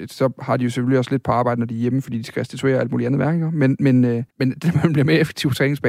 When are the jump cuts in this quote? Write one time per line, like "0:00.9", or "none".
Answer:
0:04.3

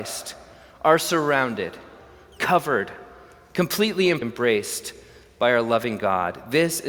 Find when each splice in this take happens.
0:04.2

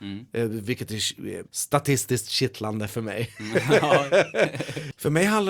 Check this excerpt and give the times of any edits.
0:01.5

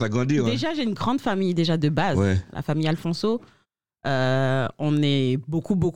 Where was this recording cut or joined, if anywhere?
none

